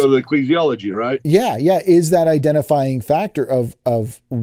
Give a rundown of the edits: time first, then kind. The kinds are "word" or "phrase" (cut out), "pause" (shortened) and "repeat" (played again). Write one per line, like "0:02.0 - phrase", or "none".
none